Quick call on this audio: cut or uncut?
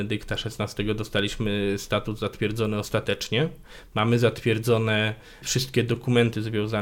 uncut